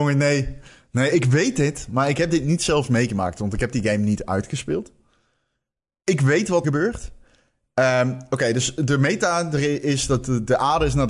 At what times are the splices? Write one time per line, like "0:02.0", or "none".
0:06.6